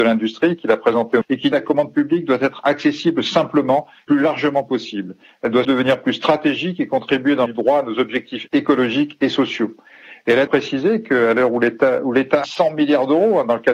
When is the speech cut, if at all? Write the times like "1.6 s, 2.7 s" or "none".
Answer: 1.2 s, 1.5 s, 4.1 s, 5.6 s, 7.5 s, 8.5 s, 10.5 s, 12.4 s